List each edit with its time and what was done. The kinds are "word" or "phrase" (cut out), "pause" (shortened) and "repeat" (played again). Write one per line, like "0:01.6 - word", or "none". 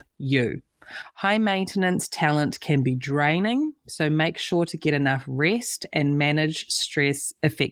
none